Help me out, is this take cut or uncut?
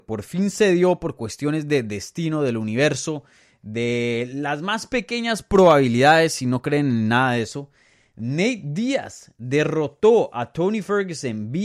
uncut